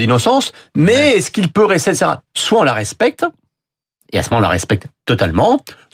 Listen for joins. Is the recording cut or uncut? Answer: uncut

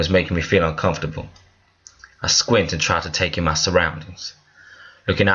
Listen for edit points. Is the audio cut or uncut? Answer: uncut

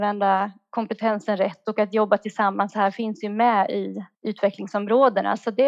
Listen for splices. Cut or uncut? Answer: cut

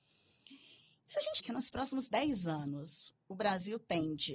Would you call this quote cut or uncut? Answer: cut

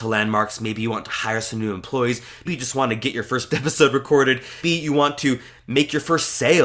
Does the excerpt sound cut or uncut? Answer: cut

